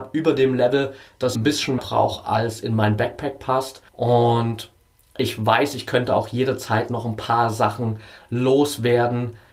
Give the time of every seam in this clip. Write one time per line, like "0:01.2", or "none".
0:01.3
0:01.8
0:03.9